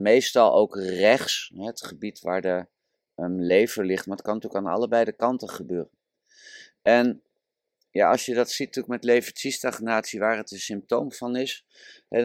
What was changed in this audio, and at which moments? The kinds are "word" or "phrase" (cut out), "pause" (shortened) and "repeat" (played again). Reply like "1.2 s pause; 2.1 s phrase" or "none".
none